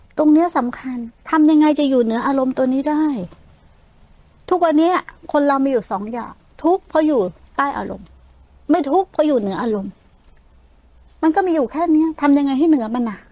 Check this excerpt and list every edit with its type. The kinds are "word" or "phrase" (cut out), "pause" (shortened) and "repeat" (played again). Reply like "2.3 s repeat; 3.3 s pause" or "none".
none